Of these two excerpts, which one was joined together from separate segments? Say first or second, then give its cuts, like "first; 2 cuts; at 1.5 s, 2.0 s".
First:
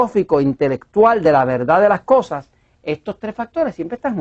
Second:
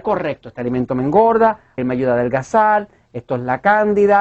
second; 1 cut; at 1.8 s